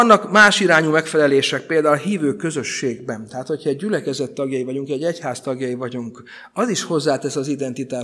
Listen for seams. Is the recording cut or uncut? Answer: uncut